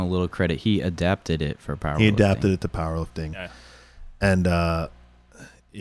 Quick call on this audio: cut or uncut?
uncut